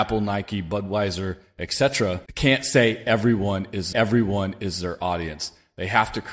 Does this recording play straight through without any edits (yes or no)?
no